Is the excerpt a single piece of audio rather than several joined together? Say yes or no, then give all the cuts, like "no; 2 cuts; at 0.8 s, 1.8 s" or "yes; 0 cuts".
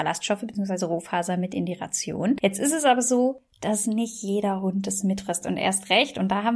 yes; 0 cuts